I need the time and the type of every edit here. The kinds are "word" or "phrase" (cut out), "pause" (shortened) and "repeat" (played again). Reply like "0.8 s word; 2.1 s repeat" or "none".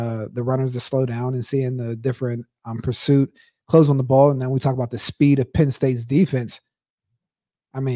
none